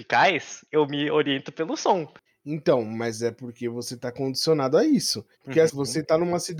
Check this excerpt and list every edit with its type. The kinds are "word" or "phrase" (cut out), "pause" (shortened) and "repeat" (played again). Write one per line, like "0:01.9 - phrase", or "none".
0:02.3 - pause
0:05.3 - pause
0:05.7 - word